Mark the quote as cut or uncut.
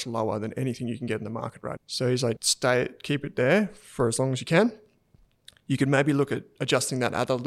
cut